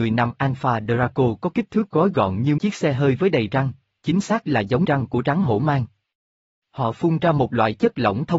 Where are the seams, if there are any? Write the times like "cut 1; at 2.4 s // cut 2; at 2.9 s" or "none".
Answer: cut 1; at 2.6 s // cut 2; at 4.8 s